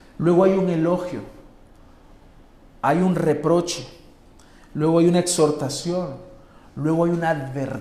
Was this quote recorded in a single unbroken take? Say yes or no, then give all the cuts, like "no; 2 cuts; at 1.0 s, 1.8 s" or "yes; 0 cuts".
yes; 0 cuts